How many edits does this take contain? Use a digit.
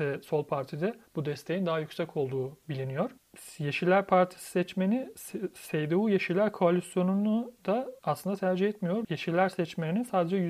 2